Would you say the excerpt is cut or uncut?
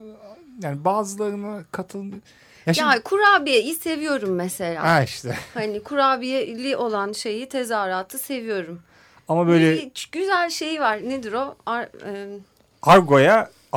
uncut